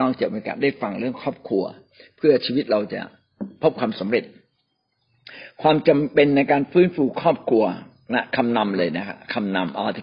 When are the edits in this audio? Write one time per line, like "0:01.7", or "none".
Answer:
none